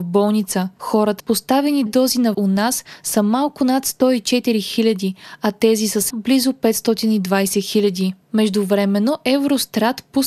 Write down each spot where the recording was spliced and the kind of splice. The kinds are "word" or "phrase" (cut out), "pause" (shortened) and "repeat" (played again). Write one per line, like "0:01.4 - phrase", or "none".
0:01.2 - word
0:01.9 - word
0:02.3 - word
0:06.1 - word